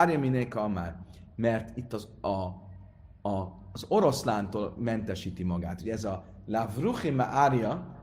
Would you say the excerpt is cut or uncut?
uncut